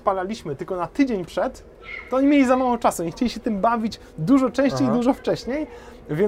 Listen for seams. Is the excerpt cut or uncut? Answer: uncut